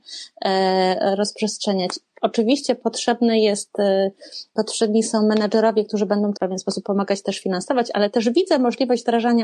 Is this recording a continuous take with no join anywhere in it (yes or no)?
no